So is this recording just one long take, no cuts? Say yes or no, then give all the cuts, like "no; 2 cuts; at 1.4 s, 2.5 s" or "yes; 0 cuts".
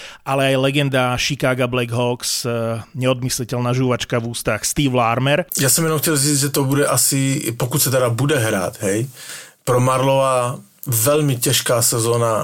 yes; 0 cuts